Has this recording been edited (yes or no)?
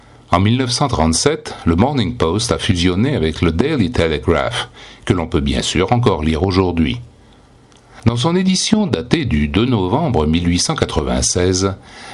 no